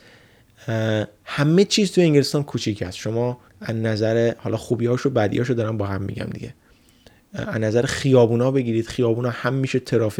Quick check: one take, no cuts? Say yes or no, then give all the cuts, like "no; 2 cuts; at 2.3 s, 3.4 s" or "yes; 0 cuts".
no; 1 cut; at 3.5 s